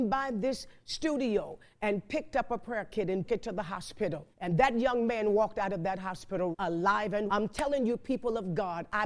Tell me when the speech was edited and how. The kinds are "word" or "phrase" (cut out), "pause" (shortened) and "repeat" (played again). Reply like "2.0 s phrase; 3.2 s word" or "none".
3.2 s word; 4.3 s pause; 6.5 s word; 7.3 s word